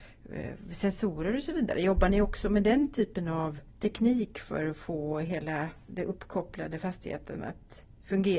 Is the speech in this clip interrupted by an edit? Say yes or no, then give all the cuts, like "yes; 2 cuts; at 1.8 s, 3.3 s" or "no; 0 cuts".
yes; 1 cut; at 3.7 s